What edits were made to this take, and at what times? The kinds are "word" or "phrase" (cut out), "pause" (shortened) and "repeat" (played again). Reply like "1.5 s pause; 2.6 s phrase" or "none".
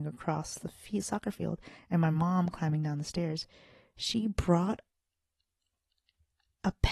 none